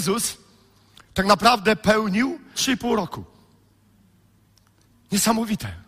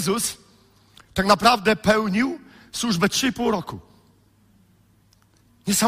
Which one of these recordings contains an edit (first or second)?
first